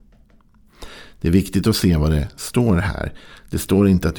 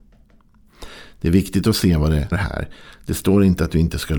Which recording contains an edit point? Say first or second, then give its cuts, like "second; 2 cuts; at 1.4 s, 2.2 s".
second; 1 cut; at 2.3 s